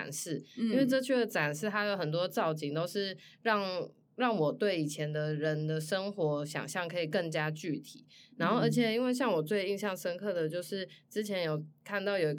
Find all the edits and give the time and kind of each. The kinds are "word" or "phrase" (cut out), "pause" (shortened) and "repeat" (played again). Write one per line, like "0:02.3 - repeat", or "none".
none